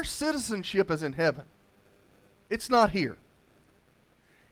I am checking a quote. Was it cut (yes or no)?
no